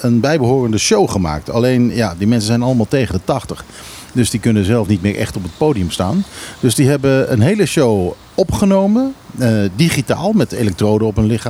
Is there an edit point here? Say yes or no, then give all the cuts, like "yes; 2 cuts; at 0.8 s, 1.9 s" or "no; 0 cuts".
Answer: no; 0 cuts